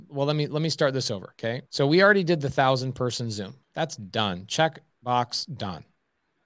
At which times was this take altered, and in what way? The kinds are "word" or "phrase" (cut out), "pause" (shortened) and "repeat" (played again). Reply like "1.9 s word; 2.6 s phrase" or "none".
1.7 s pause; 3.6 s pause